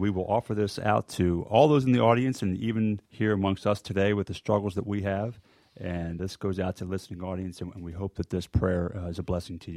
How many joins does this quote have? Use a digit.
2